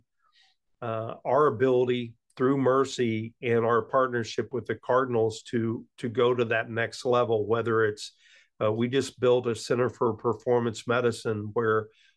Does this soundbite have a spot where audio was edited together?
no; 0 cuts

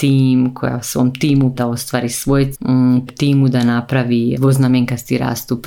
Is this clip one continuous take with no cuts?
no; 4 cuts; at 1.6 s, 2.5 s, 3.1 s, 4.3 s

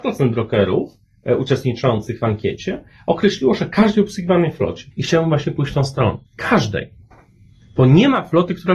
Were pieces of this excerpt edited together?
yes; 2 cuts; at 4.9 s, 6.3 s

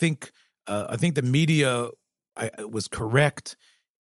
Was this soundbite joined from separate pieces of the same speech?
no; 0 cuts

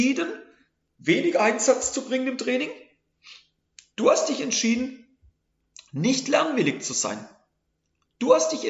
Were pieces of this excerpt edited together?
no; 0 cuts

